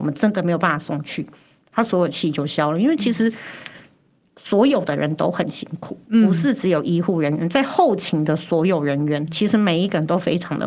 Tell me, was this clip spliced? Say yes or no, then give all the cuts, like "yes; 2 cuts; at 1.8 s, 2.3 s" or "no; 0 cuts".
yes; 1 cut; at 9.3 s